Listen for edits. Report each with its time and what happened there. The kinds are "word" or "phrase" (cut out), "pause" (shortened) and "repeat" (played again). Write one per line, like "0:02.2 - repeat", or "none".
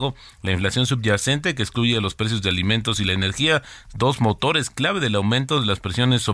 none